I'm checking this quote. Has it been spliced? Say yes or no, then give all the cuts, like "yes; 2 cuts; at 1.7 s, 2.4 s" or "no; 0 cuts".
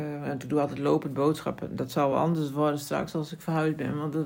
no; 0 cuts